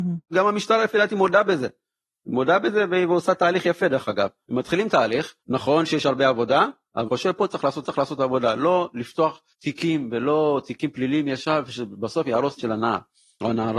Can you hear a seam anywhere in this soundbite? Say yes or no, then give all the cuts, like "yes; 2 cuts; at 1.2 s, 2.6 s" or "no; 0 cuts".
yes; 5 cuts; at 5.4 s, 7.1 s, 7.8 s, 9.5 s, 12.6 s